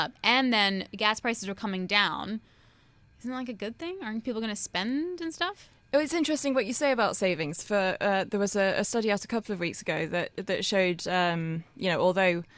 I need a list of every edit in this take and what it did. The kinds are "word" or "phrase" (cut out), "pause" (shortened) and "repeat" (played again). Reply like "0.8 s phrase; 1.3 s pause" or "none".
none